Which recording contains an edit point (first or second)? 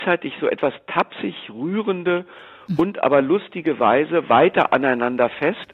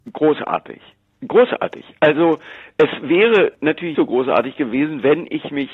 second